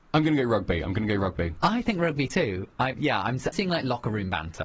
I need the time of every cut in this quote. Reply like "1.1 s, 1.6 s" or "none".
3.5 s